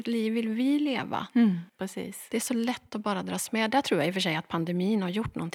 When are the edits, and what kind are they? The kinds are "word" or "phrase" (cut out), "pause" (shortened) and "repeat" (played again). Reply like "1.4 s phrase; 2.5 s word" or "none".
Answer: 1.7 s pause